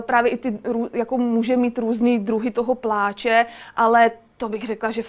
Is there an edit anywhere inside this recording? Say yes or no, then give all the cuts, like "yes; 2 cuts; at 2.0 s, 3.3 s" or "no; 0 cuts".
no; 0 cuts